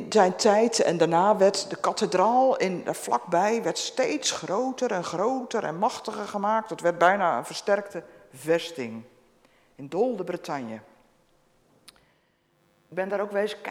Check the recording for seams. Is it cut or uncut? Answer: uncut